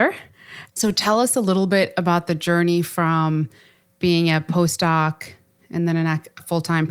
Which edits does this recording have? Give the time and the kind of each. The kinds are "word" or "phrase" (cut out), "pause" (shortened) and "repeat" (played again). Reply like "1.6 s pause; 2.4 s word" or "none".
none